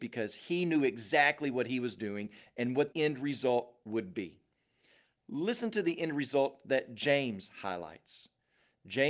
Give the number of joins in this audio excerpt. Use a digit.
1